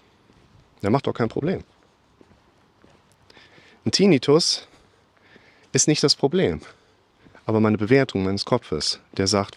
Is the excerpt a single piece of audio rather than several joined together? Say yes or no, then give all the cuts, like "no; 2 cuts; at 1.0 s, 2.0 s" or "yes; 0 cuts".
yes; 0 cuts